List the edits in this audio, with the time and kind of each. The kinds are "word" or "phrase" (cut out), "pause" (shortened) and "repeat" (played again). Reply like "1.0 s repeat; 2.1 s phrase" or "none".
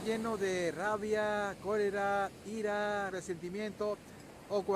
3.1 s word